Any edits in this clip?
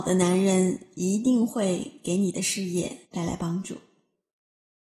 yes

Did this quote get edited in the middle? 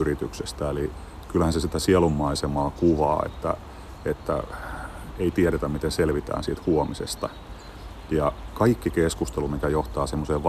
no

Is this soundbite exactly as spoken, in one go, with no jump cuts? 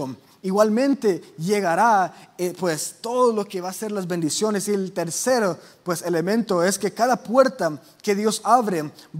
yes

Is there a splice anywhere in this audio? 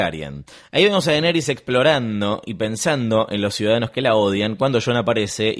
no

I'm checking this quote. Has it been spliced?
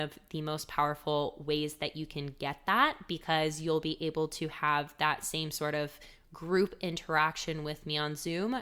no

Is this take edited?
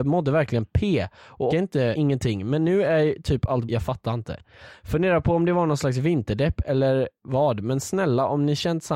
yes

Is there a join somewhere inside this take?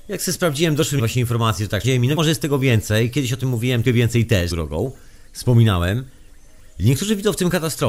yes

